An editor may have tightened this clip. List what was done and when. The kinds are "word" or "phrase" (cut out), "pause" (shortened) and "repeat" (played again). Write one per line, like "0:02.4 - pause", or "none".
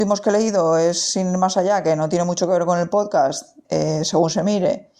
0:03.6 - pause